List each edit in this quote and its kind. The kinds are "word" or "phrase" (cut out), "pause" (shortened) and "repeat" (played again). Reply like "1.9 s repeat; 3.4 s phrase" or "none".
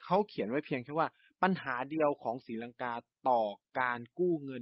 none